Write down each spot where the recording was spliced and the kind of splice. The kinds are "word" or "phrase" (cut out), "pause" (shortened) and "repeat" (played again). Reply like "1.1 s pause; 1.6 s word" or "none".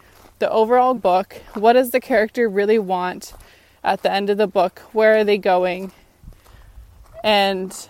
1.0 s phrase